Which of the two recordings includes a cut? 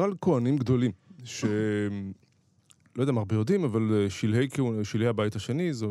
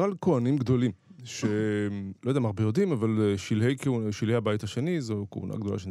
second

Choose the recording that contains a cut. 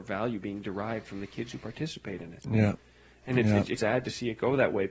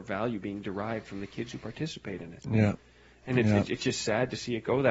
first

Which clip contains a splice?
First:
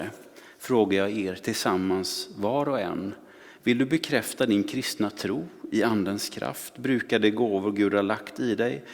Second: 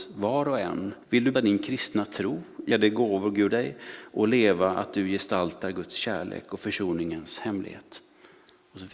second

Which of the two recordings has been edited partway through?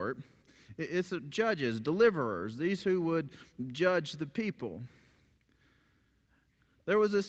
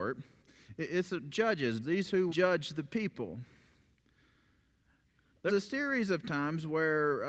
second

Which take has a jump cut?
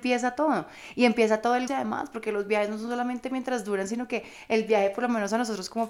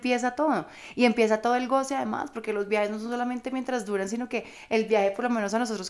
first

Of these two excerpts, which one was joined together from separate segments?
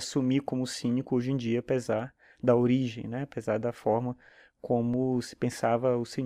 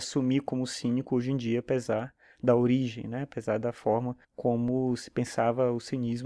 second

